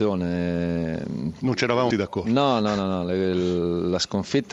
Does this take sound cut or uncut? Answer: cut